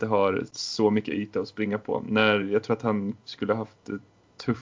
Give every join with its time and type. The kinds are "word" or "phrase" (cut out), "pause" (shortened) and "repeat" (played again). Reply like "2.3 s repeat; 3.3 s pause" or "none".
none